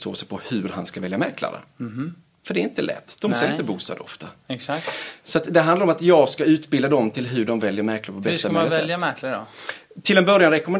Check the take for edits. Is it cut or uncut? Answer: uncut